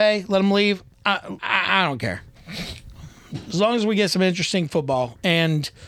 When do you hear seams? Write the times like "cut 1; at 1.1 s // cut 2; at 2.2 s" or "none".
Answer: cut 1; at 1.4 s